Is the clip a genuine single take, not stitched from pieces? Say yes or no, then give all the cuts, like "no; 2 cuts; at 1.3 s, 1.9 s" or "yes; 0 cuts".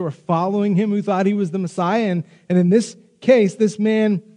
yes; 0 cuts